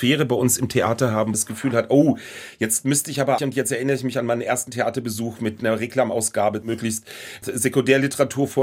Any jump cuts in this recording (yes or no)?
yes